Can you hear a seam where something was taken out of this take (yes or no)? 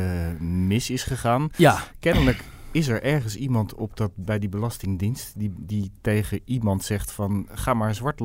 no